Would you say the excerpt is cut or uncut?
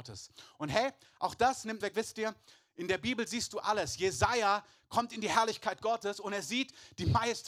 cut